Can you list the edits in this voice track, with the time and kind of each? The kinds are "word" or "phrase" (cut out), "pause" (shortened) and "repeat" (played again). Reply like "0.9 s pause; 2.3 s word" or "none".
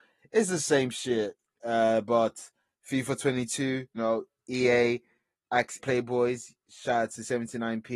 4.0 s word; 5.8 s word